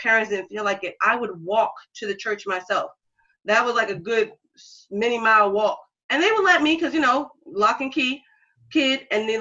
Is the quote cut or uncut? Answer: uncut